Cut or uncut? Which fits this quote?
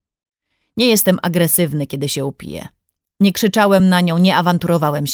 uncut